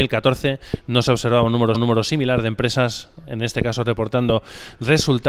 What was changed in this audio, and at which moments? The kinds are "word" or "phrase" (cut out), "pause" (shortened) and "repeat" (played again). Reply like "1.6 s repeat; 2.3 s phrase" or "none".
1.7 s repeat